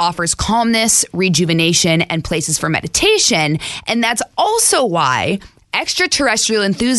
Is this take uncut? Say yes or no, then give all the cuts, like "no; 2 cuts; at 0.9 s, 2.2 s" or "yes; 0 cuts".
yes; 0 cuts